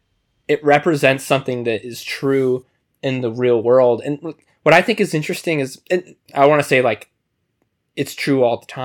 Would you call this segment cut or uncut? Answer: uncut